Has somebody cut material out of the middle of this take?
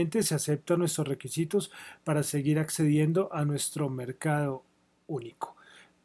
no; 0 cuts

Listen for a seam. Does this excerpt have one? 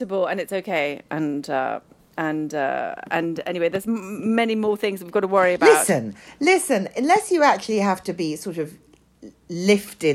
no; 0 cuts

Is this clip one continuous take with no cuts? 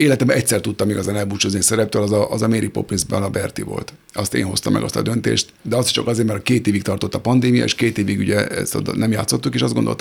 no; 1 cut; at 5.6 s

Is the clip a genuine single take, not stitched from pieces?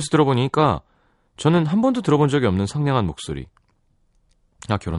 yes; 0 cuts

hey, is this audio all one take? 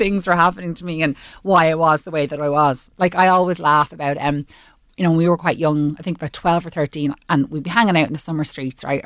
yes; 0 cuts

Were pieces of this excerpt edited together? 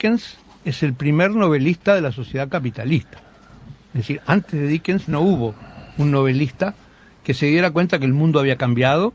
no; 0 cuts

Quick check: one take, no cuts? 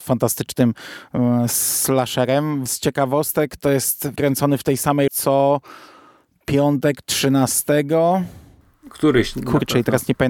no; 3 cuts; at 2.7 s, 4.2 s, 5.1 s

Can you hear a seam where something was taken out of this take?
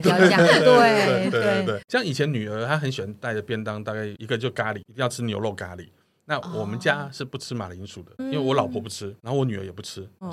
no; 0 cuts

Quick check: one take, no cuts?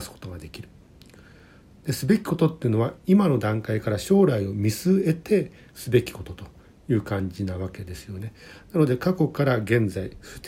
yes; 0 cuts

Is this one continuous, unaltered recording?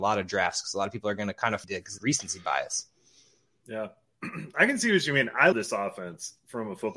no; 3 cuts; at 1.6 s, 2.0 s, 5.5 s

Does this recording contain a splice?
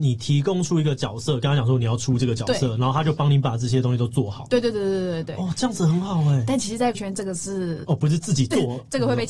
yes; 1 cut; at 6.9 s

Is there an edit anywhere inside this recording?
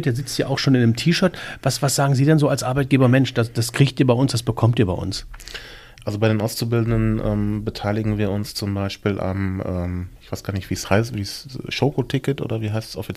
no; 0 cuts

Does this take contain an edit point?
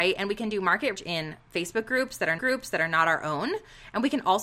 yes; 2 cuts; at 0.9 s, 2.4 s

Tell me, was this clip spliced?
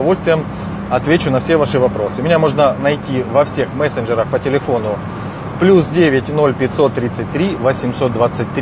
no; 0 cuts

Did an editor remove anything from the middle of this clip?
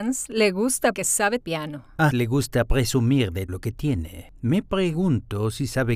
yes; 4 cuts; at 0.9 s, 1.4 s, 2.1 s, 3.5 s

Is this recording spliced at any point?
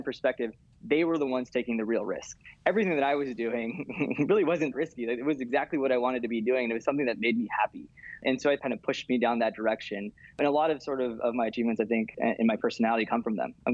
yes; 3 cuts; at 4.7 s, 8.6 s, 11.2 s

